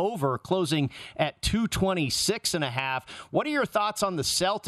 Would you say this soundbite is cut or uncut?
uncut